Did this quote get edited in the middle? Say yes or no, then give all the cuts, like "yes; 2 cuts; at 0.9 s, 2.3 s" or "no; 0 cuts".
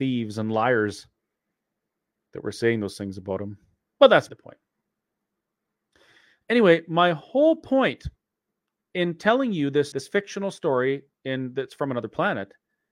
yes; 2 cuts; at 4.3 s, 9.9 s